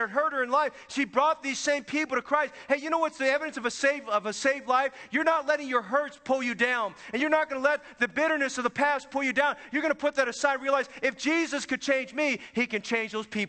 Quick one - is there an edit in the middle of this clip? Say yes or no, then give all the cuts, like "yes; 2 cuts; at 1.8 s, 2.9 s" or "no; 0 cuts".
no; 0 cuts